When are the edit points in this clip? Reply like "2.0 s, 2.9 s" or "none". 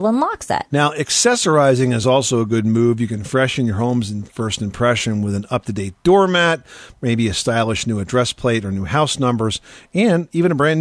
none